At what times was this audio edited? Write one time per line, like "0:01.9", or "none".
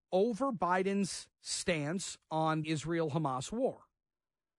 0:01.3
0:02.6

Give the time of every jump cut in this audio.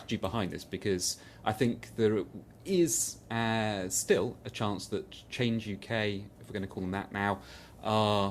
none

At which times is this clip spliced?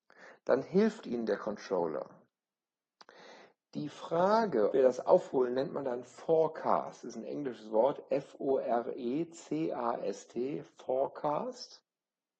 0:04.7

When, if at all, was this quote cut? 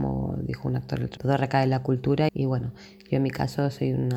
0:01.2
0:02.3

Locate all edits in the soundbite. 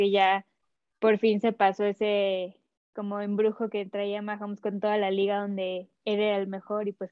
none

